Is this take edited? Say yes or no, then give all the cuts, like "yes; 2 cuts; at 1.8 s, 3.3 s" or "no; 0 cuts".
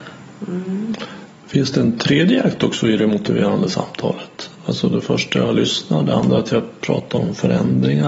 yes; 1 cut; at 4.5 s